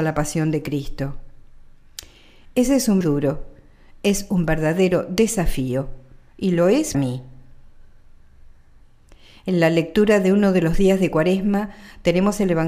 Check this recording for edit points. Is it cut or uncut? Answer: cut